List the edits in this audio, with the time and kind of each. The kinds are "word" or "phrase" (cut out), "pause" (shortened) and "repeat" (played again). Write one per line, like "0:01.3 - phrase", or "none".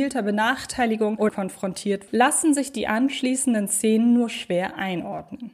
0:01.3 - word
0:02.1 - word